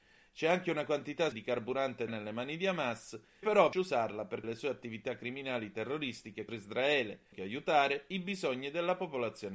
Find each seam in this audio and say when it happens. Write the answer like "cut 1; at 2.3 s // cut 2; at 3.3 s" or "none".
cut 1; at 1.3 s // cut 2; at 2.1 s // cut 3; at 3.4 s // cut 4; at 3.7 s // cut 5; at 4.4 s // cut 6; at 6.5 s // cut 7; at 7.3 s